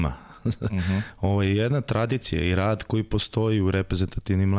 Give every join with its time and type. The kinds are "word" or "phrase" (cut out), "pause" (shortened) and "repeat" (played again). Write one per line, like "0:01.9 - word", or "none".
none